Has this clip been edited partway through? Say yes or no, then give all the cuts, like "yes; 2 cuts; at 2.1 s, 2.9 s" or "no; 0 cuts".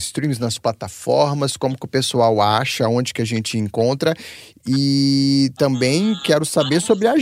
no; 0 cuts